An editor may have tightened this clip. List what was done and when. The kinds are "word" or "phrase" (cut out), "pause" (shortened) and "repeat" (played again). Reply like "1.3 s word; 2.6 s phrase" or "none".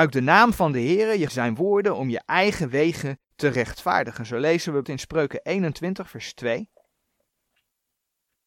1.3 s word; 3.2 s pause; 4.8 s word